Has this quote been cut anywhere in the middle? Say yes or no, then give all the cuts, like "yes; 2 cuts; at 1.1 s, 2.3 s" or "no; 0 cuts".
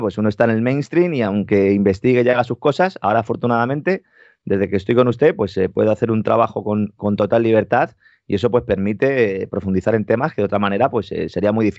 no; 0 cuts